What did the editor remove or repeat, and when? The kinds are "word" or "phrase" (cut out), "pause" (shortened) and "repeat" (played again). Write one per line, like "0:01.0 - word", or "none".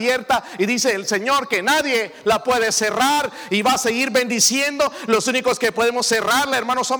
none

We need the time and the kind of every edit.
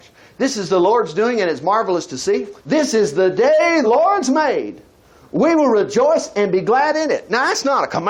0:02.6 - pause
0:03.8 - word

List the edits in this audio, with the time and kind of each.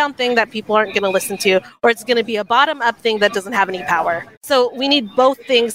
0:04.4 - pause

